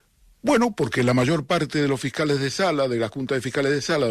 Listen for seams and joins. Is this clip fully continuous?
yes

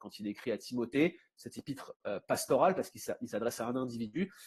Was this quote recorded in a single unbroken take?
yes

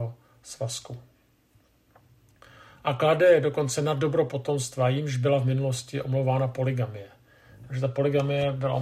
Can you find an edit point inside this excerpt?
no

